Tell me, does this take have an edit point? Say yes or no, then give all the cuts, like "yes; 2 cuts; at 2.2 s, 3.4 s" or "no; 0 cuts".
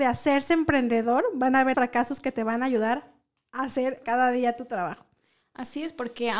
yes; 2 cuts; at 1.7 s, 4.0 s